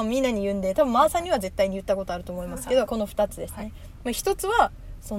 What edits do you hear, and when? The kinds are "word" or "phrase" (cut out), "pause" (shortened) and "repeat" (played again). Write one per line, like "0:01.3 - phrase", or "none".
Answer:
0:02.9 - phrase